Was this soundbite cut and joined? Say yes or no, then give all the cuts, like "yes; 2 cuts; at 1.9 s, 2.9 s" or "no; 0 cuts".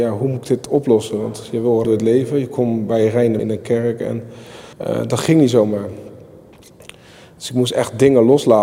yes; 3 cuts; at 1.8 s, 3.4 s, 4.7 s